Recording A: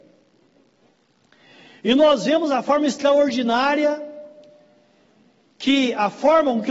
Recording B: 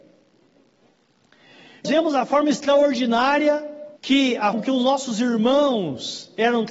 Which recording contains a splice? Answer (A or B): B